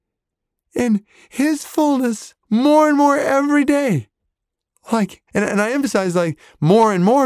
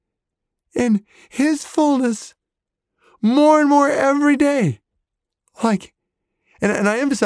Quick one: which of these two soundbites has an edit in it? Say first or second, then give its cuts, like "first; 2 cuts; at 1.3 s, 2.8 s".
first; 2 cuts; at 2.4 s, 5.3 s